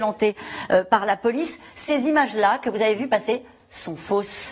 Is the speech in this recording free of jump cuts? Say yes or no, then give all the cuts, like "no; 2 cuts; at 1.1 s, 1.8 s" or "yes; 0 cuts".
yes; 0 cuts